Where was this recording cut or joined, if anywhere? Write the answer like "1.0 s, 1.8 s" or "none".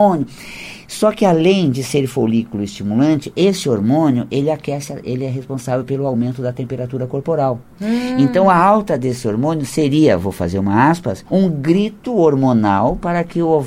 11.3 s